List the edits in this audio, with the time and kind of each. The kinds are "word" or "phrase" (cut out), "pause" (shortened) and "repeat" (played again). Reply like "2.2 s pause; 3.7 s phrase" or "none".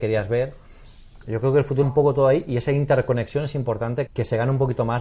1.8 s word; 4.1 s word